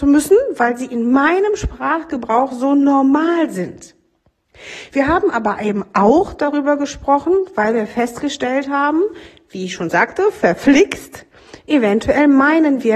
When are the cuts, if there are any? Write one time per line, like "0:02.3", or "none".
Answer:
none

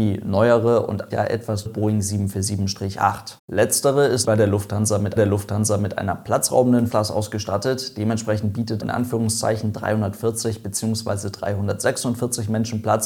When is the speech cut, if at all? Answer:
0:01.1
0:01.7
0:03.4
0:04.2
0:05.2
0:06.9
0:08.8

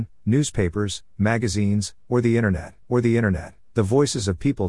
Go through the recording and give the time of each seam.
0:02.8

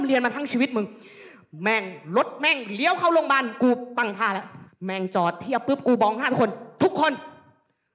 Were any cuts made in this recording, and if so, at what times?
0:04.7

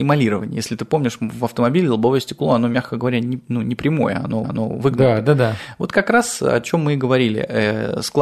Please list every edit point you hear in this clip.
0:04.4

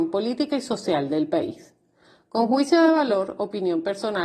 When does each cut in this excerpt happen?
none

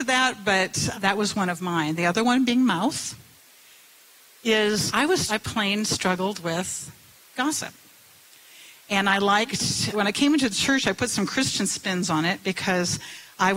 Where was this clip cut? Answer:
0:00.9
0:04.9
0:05.3
0:09.9

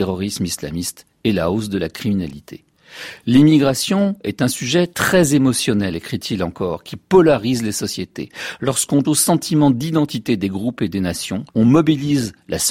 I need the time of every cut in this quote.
0:09.0
0:11.5

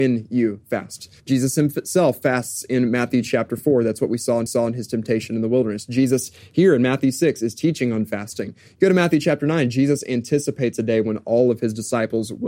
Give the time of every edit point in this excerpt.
0:01.2
0:04.5

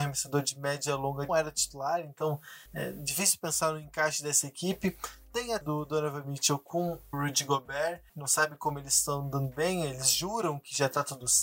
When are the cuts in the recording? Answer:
0:01.3
0:02.7
0:05.6
0:07.1
0:08.1

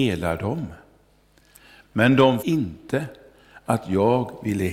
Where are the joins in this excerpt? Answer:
0:02.4

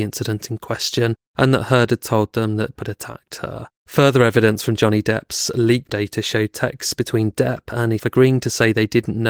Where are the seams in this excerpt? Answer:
0:02.7
0:03.8
0:05.9
0:08.0

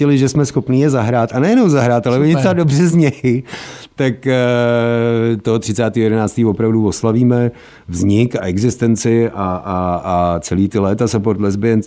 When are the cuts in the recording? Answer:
none

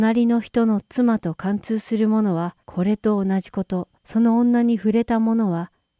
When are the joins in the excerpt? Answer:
0:02.6
0:04.0

